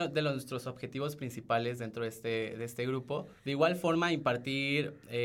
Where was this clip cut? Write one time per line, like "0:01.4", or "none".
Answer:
0:03.4